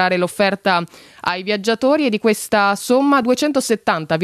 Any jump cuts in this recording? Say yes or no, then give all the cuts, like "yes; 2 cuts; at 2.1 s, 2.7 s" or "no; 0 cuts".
no; 0 cuts